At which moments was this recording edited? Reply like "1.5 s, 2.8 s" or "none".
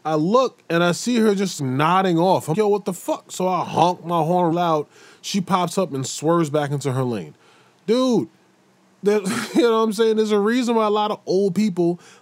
1.6 s, 2.5 s, 4.5 s